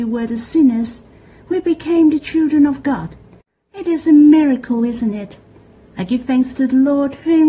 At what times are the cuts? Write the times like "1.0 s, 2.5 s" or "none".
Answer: none